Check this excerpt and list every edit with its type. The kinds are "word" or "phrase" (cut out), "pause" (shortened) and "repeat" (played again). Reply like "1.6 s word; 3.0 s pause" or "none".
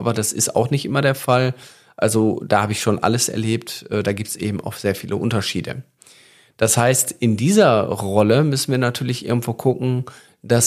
none